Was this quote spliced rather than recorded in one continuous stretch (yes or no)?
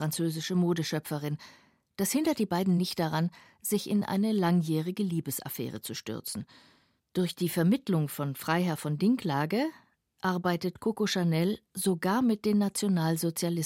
no